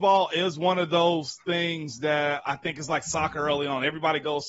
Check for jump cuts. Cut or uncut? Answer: cut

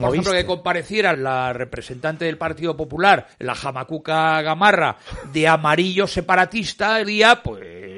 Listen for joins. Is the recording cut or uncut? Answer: cut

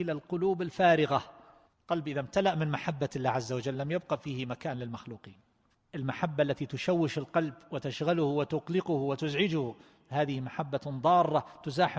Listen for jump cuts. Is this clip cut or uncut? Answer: uncut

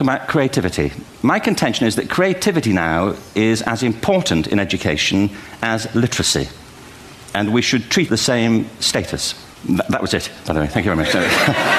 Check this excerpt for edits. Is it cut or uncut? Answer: cut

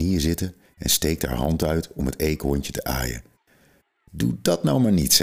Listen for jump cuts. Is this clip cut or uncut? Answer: uncut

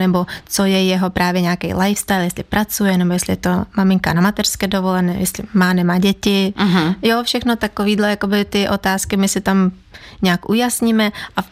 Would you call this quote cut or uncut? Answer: uncut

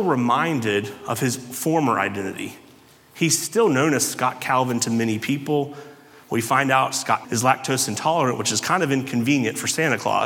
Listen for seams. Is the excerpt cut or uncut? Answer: cut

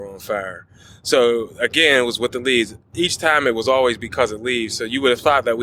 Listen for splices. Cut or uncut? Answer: uncut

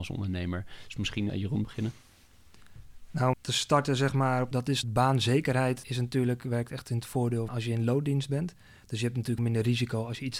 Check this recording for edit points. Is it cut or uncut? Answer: cut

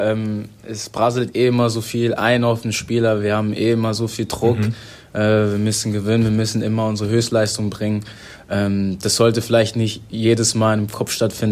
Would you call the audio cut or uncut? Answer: uncut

